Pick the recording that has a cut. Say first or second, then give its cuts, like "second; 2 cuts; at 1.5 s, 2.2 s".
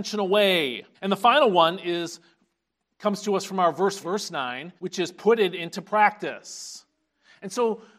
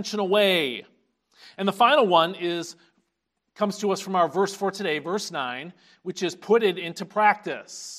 first; 3 cuts; at 0.9 s, 4.0 s, 4.8 s